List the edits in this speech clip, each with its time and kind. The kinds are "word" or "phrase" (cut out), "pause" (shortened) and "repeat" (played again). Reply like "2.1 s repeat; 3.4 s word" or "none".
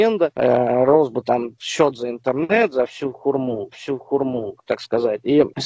3.7 s repeat